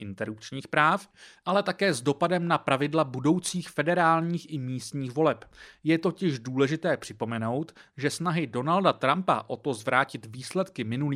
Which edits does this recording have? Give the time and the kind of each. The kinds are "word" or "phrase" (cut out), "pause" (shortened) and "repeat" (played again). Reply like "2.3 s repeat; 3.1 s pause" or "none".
none